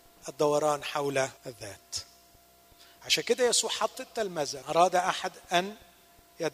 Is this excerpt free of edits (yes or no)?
no